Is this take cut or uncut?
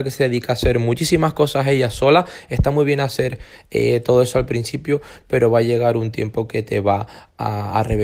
uncut